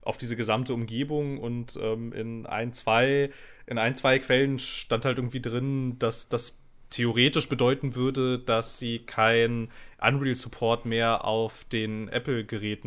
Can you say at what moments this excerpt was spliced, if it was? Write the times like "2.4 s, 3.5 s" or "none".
none